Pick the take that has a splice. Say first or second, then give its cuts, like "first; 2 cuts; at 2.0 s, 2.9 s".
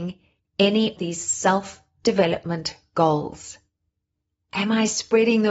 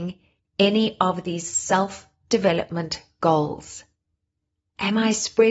first; 1 cut; at 1.0 s